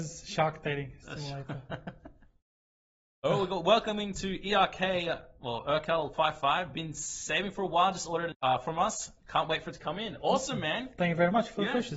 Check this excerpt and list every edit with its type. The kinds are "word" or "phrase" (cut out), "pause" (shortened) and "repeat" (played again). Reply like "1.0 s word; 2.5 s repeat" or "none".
8.3 s phrase